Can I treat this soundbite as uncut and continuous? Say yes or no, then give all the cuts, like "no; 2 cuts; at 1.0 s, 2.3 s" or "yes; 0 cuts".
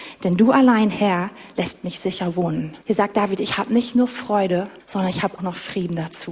no; 3 cuts; at 2.8 s, 4.8 s, 5.4 s